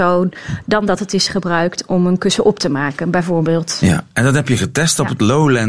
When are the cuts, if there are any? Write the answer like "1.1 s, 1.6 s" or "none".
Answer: none